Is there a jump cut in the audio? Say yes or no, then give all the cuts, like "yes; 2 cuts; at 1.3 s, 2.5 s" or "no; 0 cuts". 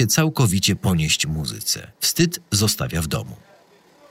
yes; 1 cut; at 1.9 s